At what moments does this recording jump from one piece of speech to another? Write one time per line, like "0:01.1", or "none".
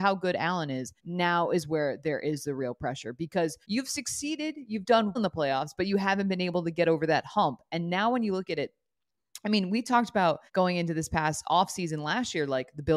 0:01.0
0:03.6
0:05.2
0:10.5